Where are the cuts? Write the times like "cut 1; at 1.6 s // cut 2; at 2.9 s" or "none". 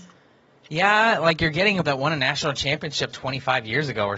cut 1; at 1.8 s // cut 2; at 3.1 s